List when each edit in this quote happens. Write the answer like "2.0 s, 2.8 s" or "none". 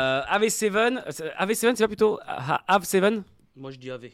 none